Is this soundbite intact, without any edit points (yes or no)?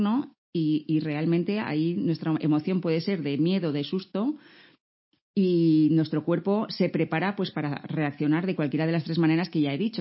yes